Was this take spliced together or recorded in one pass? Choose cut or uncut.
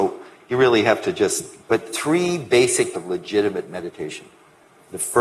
cut